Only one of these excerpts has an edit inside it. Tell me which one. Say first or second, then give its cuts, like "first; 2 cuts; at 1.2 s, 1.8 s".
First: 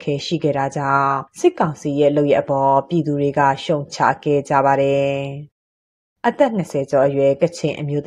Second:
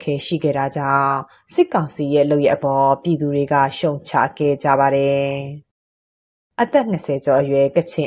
first; 2 cuts; at 1.3 s, 5.5 s